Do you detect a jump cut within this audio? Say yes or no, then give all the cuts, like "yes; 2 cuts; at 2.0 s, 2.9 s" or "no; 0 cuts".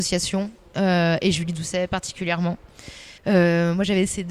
yes; 1 cut; at 3.2 s